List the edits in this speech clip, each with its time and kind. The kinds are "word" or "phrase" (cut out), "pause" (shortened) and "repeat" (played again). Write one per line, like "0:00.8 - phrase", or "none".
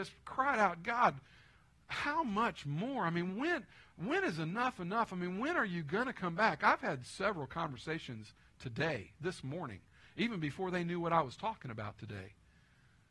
none